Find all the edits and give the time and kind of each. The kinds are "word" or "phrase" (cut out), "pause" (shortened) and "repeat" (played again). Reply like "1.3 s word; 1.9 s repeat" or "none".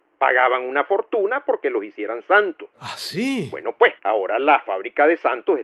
4.0 s pause